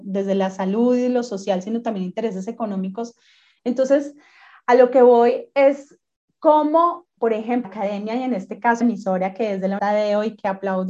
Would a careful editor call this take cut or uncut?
cut